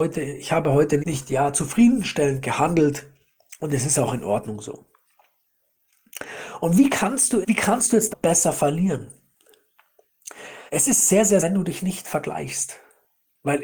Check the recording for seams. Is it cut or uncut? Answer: cut